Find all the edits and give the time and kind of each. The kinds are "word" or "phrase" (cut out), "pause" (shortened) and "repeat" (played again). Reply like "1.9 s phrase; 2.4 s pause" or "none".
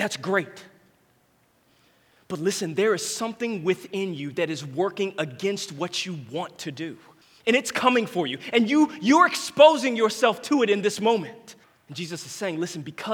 7.2 s pause; 11.6 s pause